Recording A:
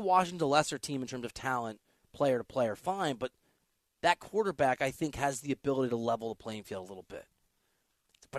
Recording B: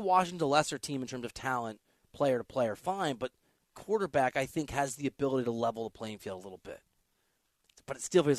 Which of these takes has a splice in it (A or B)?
B